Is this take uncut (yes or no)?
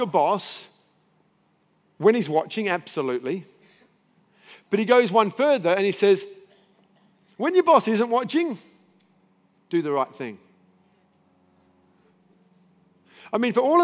yes